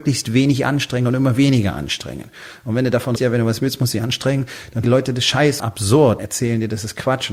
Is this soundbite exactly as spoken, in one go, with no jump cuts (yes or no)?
no